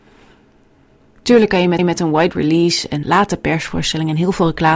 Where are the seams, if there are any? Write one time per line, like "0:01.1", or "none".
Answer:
0:01.8
0:03.0